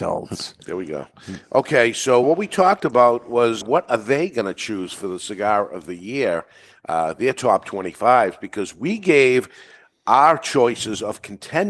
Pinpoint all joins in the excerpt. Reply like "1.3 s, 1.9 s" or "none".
2.2 s, 3.6 s